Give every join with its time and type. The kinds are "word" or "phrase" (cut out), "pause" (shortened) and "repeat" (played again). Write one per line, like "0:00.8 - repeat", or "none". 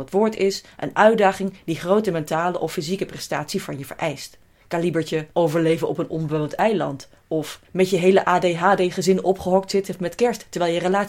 0:05.3 - pause
0:07.6 - pause